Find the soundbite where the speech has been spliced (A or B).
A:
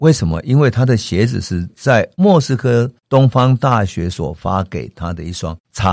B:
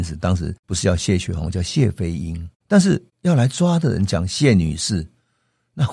A